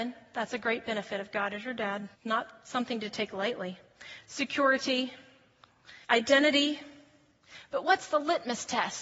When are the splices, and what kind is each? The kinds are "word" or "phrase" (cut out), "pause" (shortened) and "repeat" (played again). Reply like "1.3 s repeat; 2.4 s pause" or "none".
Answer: 2.1 s pause; 6.0 s pause